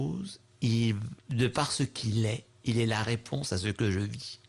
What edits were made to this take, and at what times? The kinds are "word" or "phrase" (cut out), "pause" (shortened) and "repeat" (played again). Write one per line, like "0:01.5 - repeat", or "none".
0:01.2 - pause

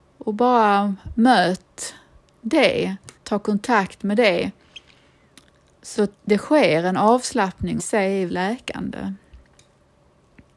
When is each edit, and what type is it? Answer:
0:03.2 - pause
0:06.1 - pause
0:07.8 - phrase
0:08.3 - word

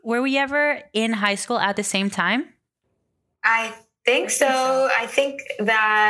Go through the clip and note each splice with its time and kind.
none

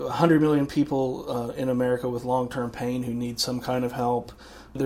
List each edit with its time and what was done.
none

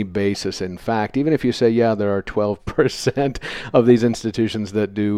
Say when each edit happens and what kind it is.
0:02.6 - word

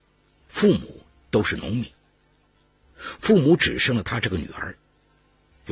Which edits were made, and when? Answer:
none

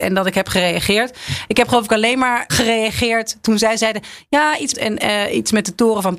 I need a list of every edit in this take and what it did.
0:02.5 - word
0:04.7 - phrase

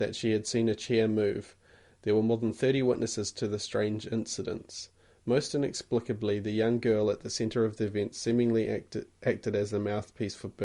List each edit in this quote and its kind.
none

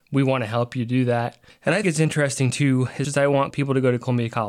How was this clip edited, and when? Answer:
0:01.5 - pause
0:01.8 - word
0:03.0 - word

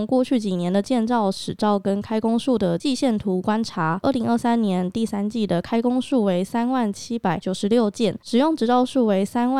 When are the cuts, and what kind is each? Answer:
0:04.0 - phrase

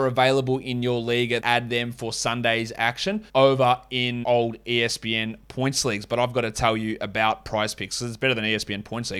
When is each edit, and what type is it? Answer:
0:01.4 - word
0:03.3 - pause
0:04.2 - word

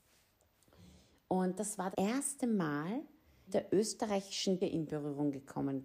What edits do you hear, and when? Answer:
0:01.9 - word
0:03.5 - phrase
0:04.6 - word

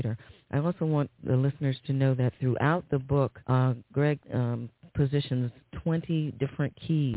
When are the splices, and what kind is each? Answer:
0:03.4 - pause
0:04.2 - pause

